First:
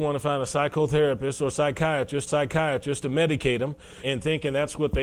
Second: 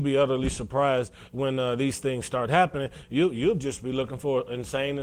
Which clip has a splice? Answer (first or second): first